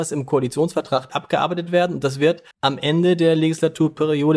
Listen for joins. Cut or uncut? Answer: cut